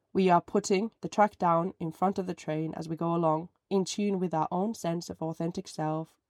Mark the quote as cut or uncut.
cut